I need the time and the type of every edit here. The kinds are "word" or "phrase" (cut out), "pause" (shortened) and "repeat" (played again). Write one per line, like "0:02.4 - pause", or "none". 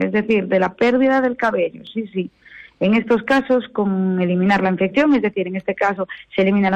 none